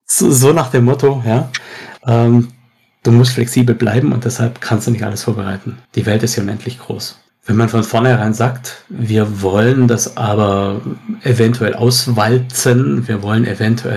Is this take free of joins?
no; 2 cuts; at 2.0 s, 5.8 s

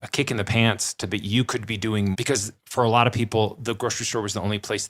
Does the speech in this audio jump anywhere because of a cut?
yes; 1 cut; at 2.1 s

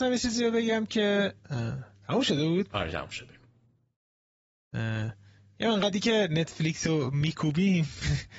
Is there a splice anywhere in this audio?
yes; 1 cut; at 1.4 s

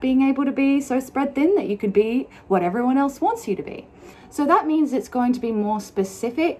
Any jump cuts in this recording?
no; 0 cuts

